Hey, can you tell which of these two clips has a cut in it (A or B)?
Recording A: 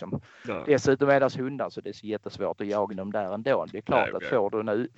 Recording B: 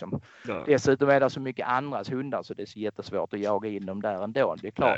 A